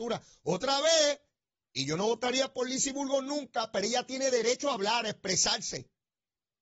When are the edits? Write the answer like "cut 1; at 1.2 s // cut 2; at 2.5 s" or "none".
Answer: none